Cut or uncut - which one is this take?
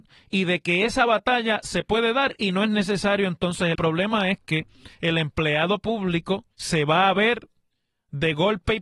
cut